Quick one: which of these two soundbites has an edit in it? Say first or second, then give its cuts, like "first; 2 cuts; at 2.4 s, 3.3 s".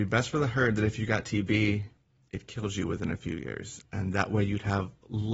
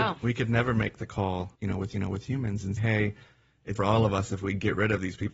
second; 4 cuts; at 1.5 s, 1.9 s, 2.8 s, 3.8 s